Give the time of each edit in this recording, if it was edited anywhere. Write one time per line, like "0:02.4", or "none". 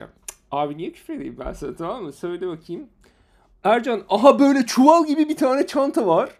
none